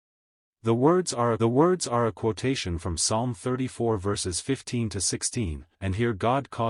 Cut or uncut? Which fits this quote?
cut